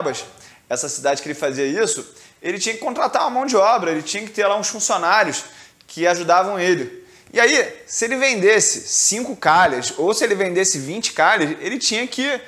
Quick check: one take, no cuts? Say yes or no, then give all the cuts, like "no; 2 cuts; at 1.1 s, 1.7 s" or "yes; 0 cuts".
yes; 0 cuts